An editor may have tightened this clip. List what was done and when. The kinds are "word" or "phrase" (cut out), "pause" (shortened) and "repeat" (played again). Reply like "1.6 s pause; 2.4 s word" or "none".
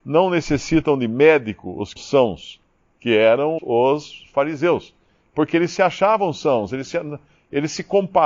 2.0 s word; 3.6 s word